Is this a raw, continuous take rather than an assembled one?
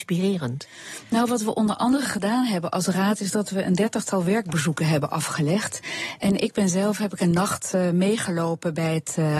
yes; 0 cuts

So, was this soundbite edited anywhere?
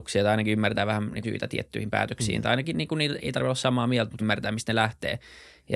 yes; 3 cuts; at 1.2 s, 3.2 s, 4.2 s

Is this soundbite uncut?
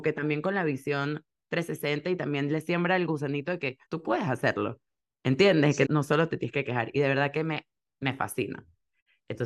no; 2 cuts; at 3.9 s, 5.8 s

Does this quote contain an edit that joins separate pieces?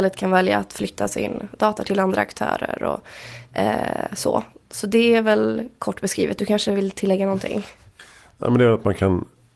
no; 0 cuts

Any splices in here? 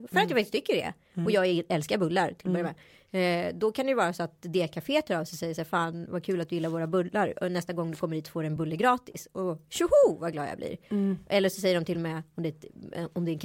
no; 0 cuts

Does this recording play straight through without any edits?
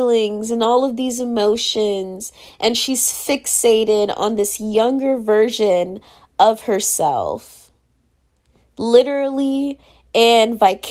yes; 0 cuts

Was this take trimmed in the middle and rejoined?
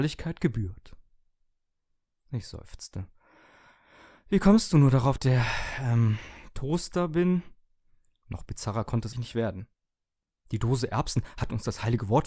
yes; 2 cuts; at 5.2 s, 9.1 s

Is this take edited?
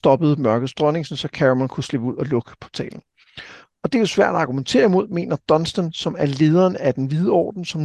no; 0 cuts

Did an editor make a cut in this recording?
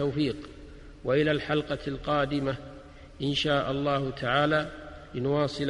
no; 0 cuts

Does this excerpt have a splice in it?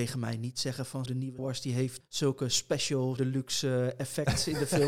yes; 4 cuts; at 1.1 s, 1.4 s, 2.0 s, 3.2 s

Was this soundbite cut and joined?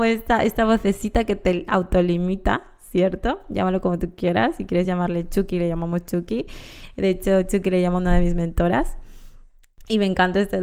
no; 0 cuts

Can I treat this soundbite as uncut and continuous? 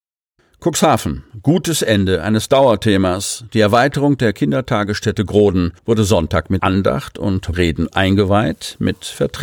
no; 4 cuts; at 5.8 s, 6.6 s, 7.5 s, 7.9 s

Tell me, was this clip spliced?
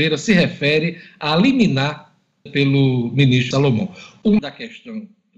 yes; 3 cuts; at 2.5 s, 3.5 s, 4.4 s

